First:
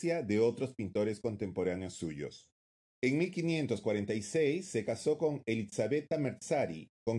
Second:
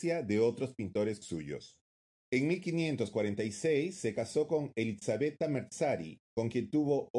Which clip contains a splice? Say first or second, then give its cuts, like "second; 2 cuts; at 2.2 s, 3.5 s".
second; 1 cut; at 1.2 s